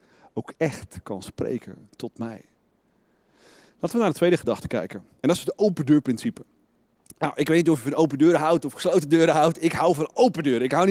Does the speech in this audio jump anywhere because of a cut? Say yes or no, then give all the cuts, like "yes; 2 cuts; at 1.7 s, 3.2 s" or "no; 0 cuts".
no; 0 cuts